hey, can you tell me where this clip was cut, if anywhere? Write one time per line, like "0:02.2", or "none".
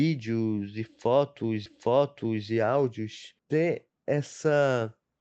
0:01.7
0:03.4